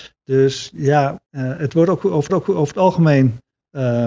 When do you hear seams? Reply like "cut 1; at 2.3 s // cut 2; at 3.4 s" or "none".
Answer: cut 1; at 1.3 s // cut 2; at 2.3 s